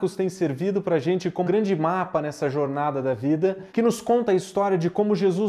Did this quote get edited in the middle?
yes; 2 cuts; at 1.4 s, 3.7 s

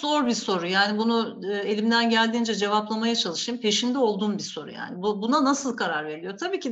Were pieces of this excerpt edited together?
no; 0 cuts

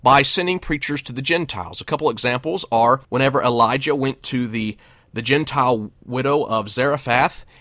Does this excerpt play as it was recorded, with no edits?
no; 1 cut; at 3.0 s

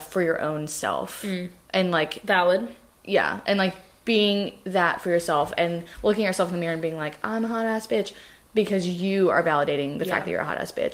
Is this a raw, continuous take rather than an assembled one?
yes; 0 cuts

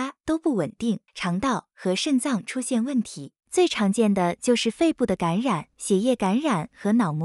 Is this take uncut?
no; 3 cuts; at 1.1 s, 3.4 s, 5.7 s

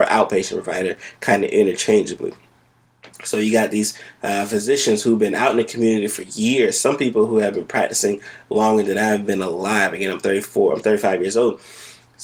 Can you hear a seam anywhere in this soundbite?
no; 0 cuts

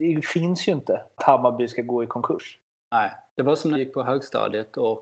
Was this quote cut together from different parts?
yes; 2 cuts; at 1.2 s, 3.7 s

